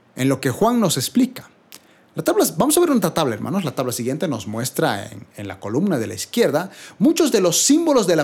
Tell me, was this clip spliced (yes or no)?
no